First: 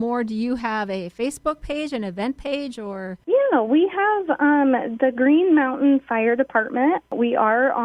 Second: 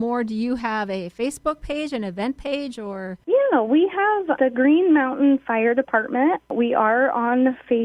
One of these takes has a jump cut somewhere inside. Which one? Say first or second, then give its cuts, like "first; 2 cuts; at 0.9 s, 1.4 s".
second; 1 cut; at 4.4 s